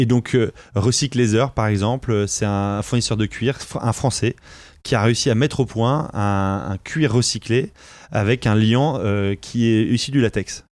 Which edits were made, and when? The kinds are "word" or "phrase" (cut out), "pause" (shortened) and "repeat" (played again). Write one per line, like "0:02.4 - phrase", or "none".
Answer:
none